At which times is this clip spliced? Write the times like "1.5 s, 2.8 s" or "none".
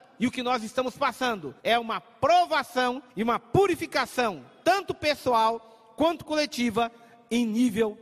1.6 s, 3.1 s